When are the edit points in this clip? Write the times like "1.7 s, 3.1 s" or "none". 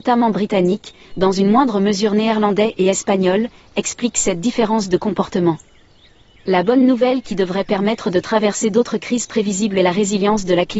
none

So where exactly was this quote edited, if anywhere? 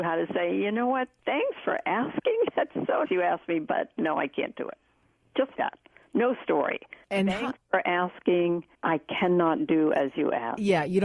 3.0 s, 5.5 s, 7.0 s, 8.7 s

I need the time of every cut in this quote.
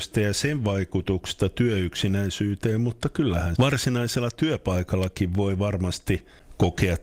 3.6 s

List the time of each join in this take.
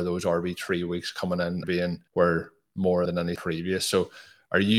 1.6 s, 2.1 s, 3.1 s, 3.4 s

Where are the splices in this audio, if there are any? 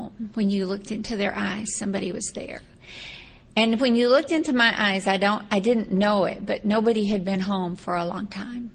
none

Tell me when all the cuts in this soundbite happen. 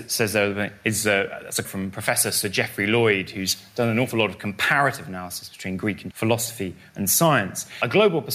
1.6 s, 6.1 s

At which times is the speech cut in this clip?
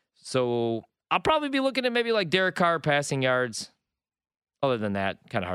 none

